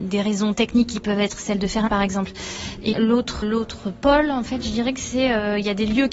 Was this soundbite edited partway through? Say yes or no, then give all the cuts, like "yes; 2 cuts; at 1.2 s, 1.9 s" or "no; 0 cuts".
yes; 3 cuts; at 1.9 s, 2.9 s, 3.4 s